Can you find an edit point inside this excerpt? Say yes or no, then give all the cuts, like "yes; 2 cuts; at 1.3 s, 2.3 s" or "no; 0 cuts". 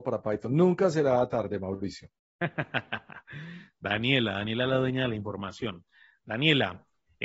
no; 0 cuts